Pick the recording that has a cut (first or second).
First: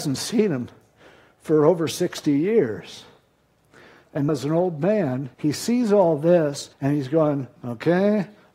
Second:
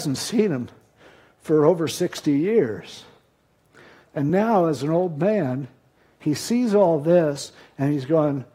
first